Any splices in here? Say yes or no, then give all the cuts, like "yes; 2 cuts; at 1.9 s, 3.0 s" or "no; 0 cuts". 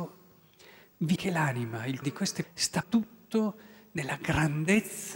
yes; 4 cuts; at 1.2 s, 2.0 s, 2.4 s, 2.8 s